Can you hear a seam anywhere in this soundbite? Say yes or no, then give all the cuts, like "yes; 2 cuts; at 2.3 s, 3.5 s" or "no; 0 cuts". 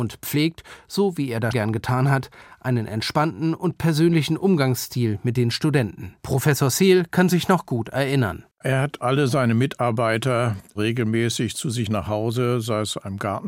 yes; 3 cuts; at 1.5 s, 6.2 s, 8.5 s